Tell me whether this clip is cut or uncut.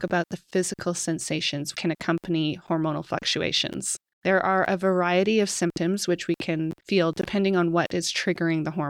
cut